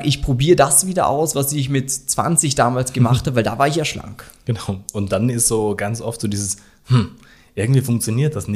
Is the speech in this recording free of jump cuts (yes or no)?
yes